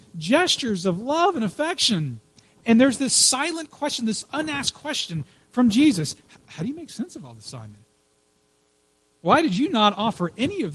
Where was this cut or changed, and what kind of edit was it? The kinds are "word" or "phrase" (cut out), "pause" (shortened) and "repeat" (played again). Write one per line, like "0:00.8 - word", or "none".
none